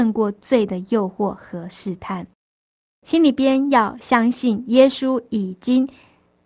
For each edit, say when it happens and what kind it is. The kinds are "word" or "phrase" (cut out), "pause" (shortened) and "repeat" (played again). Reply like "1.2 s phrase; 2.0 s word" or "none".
none